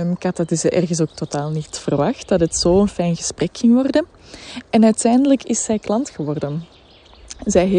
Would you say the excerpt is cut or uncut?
uncut